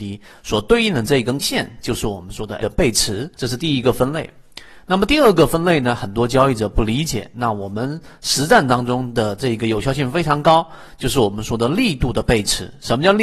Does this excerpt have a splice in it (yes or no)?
yes